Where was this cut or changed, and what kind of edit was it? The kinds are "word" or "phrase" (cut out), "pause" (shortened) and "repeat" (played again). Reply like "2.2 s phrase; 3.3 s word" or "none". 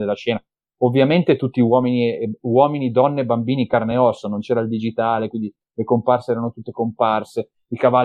none